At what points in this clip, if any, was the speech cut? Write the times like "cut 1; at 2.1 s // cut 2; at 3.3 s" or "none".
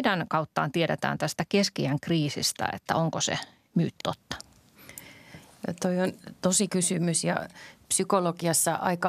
cut 1; at 4.0 s // cut 2; at 6.7 s